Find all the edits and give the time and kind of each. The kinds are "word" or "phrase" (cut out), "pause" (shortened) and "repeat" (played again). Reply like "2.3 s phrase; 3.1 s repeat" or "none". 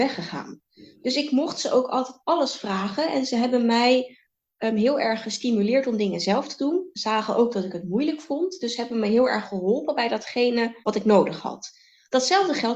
10.8 s pause